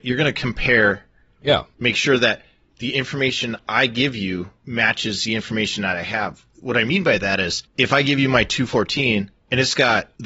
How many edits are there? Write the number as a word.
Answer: zero